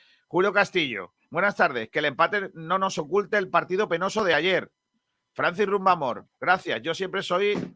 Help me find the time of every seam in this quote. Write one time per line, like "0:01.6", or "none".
none